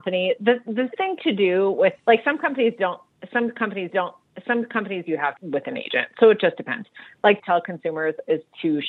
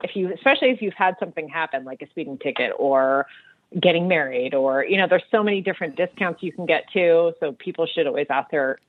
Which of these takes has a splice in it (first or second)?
first